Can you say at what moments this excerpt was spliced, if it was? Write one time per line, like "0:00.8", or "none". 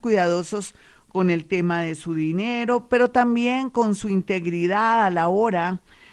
none